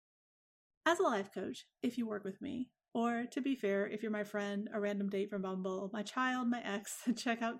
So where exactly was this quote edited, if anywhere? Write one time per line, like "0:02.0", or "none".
none